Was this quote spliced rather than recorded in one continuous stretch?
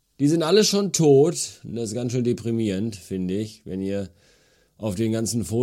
no; 0 cuts

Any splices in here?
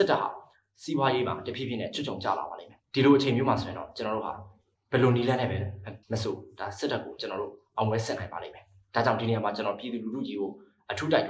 yes; 3 cuts; at 2.8 s, 4.7 s, 6.0 s

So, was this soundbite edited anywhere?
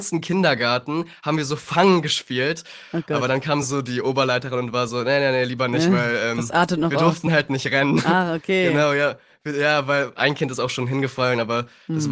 no; 0 cuts

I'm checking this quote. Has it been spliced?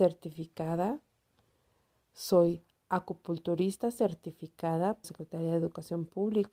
yes; 1 cut; at 5.0 s

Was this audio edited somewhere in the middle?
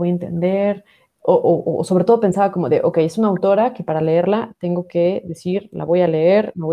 no; 0 cuts

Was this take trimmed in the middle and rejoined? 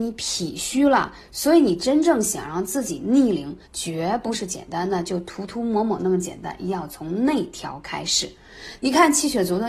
yes; 1 cut; at 3.7 s

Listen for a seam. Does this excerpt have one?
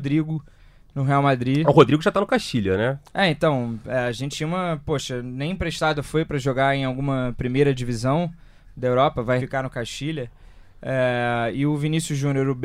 yes; 1 cut; at 9.4 s

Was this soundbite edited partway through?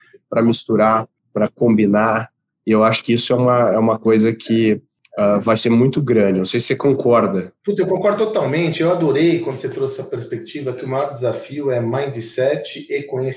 no; 0 cuts

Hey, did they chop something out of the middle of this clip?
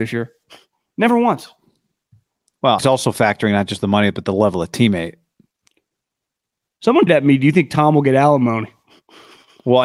yes; 2 cuts; at 2.8 s, 7.1 s

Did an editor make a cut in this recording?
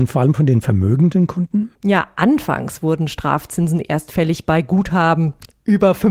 yes; 1 cut; at 1.7 s

